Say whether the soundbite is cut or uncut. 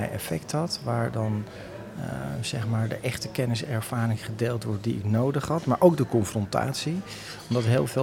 uncut